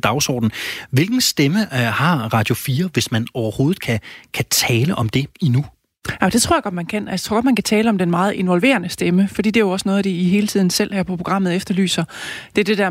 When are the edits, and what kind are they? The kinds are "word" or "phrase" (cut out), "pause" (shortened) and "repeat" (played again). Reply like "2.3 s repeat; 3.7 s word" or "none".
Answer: 5.3 s pause